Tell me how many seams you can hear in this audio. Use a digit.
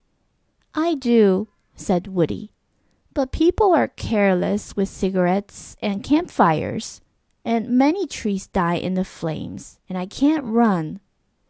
1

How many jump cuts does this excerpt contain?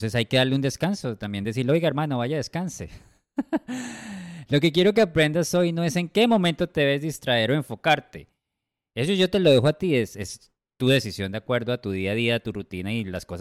0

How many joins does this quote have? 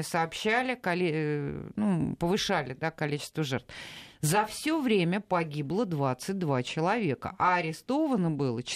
0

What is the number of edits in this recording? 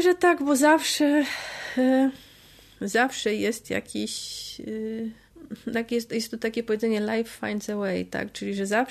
0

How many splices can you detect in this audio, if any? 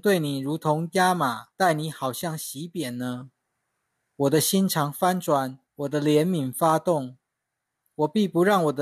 2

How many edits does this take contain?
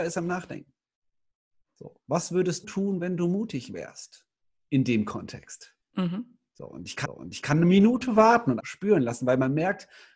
5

